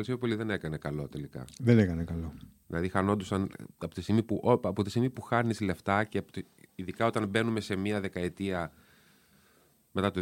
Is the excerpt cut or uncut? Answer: uncut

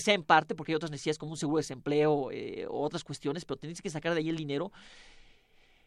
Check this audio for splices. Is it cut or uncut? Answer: uncut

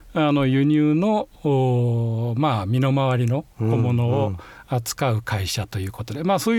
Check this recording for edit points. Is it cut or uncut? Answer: uncut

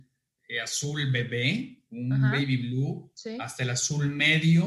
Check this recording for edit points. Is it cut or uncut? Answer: uncut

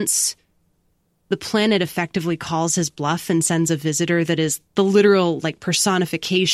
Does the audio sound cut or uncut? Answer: uncut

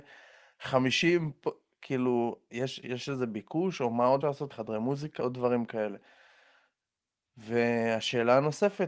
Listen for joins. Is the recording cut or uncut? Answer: cut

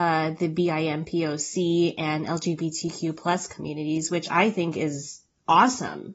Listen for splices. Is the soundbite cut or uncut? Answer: uncut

